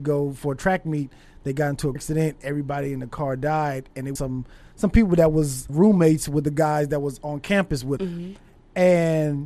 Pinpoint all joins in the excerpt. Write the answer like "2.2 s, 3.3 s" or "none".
2.0 s, 4.2 s, 5.7 s, 8.0 s